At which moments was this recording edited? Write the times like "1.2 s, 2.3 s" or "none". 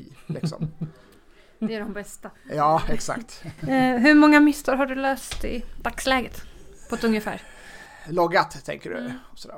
none